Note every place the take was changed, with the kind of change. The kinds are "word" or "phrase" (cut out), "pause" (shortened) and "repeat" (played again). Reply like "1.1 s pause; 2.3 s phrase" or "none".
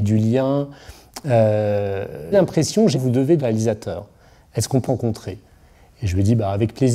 2.3 s word; 2.9 s word; 3.4 s word; 4.9 s word